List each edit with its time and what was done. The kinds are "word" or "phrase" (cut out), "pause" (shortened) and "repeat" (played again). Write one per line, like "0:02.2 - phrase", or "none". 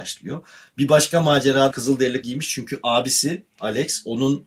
0:01.7 - word
0:02.2 - word